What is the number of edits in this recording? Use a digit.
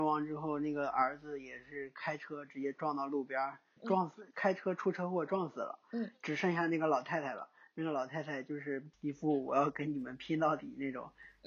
1